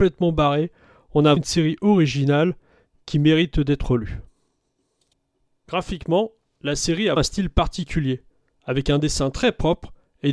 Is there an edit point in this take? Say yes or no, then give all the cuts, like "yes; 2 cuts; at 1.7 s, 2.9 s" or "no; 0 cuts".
yes; 2 cuts; at 1.4 s, 7.2 s